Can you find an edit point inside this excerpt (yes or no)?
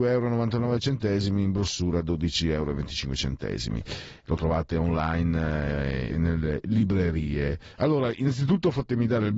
yes